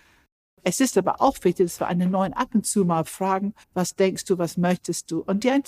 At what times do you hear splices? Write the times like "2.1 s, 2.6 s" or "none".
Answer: 3.6 s